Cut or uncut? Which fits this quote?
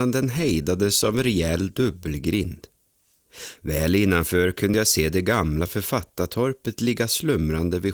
uncut